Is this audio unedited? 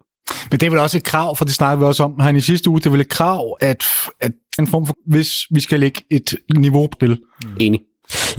no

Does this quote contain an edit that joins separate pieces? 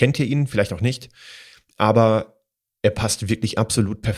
no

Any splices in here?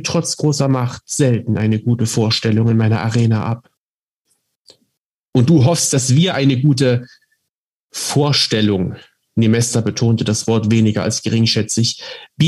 no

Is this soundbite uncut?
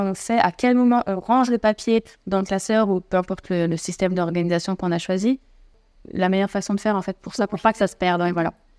yes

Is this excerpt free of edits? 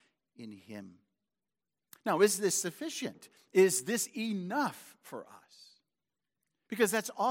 yes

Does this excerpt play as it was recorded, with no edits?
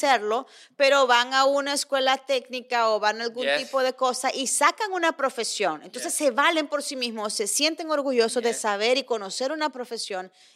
yes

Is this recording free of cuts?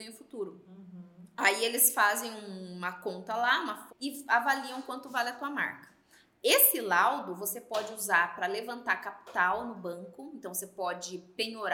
no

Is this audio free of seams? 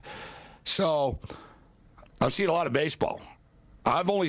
yes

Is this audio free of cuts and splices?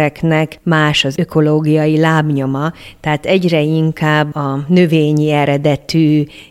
yes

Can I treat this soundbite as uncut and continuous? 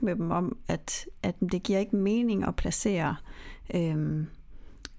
yes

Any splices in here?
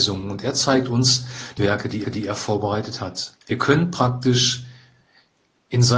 yes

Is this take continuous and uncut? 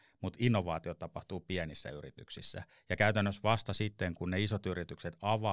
yes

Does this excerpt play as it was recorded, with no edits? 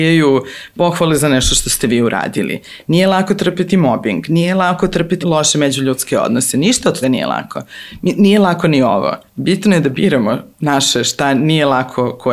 no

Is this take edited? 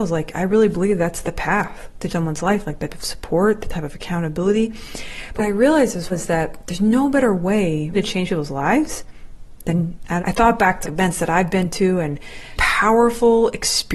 yes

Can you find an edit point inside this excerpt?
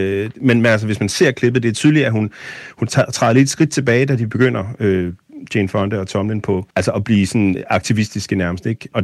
yes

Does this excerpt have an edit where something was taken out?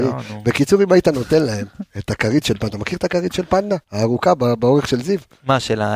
yes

